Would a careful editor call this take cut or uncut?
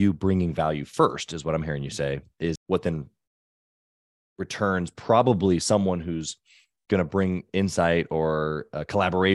cut